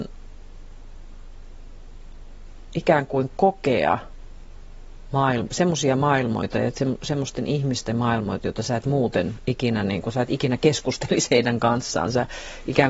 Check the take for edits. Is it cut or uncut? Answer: uncut